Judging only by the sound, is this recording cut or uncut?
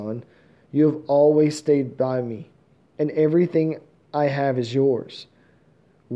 uncut